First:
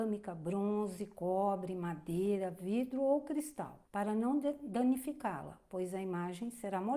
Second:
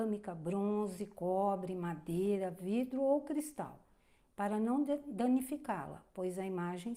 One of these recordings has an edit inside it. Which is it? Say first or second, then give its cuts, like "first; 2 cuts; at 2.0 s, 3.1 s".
first; 1 cut; at 3.9 s